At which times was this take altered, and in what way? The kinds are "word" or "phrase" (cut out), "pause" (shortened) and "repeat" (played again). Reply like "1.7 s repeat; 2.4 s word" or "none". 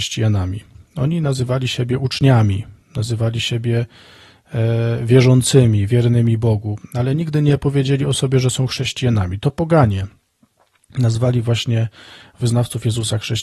none